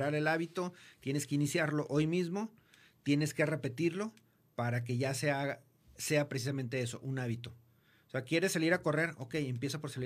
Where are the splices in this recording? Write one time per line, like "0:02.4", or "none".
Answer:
none